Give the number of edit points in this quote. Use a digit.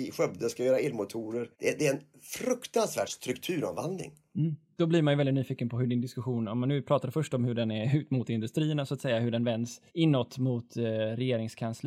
3